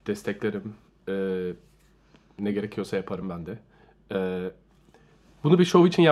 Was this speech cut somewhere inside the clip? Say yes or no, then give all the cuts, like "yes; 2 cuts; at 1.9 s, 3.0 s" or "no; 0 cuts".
no; 0 cuts